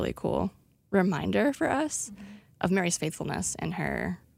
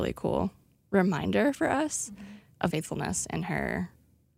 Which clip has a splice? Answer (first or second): second